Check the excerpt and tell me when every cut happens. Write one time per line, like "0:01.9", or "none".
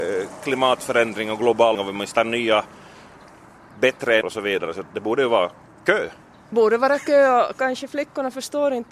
0:01.7
0:02.1
0:04.2
0:06.5